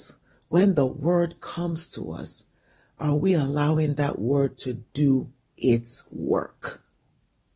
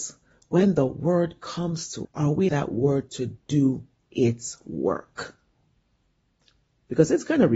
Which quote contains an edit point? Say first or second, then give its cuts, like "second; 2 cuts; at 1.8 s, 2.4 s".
second; 2 cuts; at 2.0 s, 2.5 s